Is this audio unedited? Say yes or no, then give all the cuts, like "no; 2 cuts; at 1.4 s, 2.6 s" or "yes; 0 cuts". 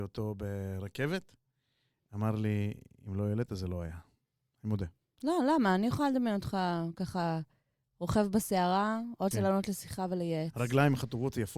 no; 1 cut; at 9.3 s